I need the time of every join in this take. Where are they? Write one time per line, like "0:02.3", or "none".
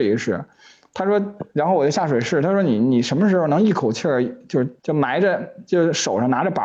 0:04.8